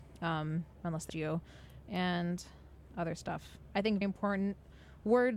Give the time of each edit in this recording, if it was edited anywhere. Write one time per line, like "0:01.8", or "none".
0:01.1
0:02.9
0:04.0